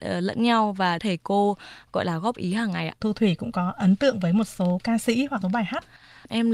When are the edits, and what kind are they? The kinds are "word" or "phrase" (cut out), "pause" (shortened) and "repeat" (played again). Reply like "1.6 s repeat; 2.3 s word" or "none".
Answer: 1.0 s phrase; 3.0 s phrase; 5.4 s phrase